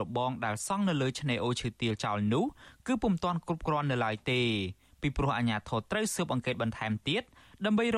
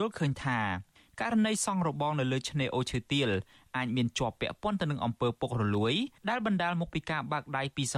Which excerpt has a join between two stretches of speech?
second; 1 cut; at 6.2 s

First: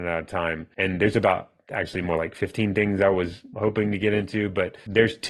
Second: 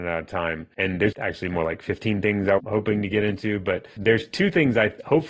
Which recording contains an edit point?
second; 2 cuts; at 1.1 s, 2.6 s

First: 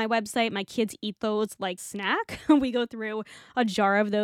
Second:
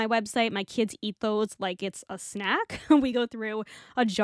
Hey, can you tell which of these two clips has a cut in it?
first; 1 cut; at 1.8 s

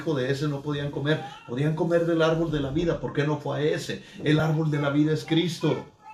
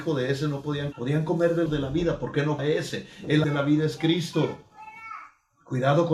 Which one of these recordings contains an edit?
second; 4 cuts; at 0.9 s, 1.7 s, 2.6 s, 3.4 s

